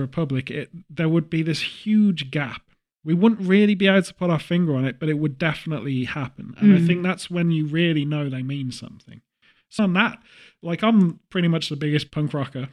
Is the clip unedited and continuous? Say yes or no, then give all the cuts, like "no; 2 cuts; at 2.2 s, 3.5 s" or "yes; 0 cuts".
no; 1 cut; at 9.8 s